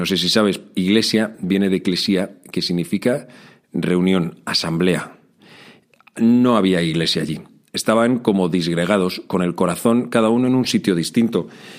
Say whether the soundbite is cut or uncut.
uncut